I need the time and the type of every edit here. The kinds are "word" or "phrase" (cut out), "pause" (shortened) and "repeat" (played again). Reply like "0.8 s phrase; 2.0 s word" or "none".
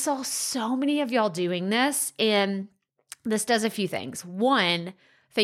none